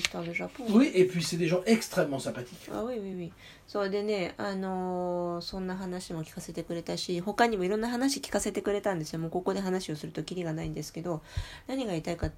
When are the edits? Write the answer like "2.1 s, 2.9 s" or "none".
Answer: none